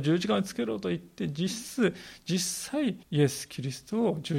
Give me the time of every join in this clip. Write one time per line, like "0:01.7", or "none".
0:03.0